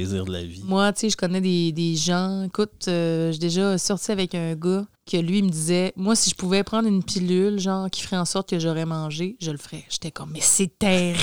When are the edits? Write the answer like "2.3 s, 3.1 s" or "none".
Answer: 4.9 s